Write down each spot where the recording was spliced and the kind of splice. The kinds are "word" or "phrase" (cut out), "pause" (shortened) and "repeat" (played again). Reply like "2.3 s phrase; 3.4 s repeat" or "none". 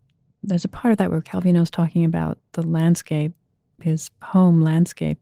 none